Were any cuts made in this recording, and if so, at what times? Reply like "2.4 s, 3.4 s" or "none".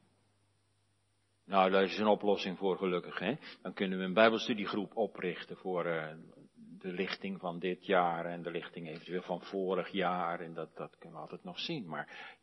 none